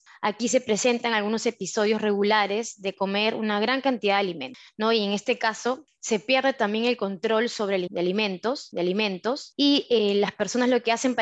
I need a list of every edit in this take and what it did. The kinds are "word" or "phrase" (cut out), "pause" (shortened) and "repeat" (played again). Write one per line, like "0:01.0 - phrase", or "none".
0:07.9 - word
0:08.7 - repeat